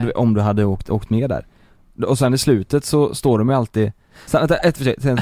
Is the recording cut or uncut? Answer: uncut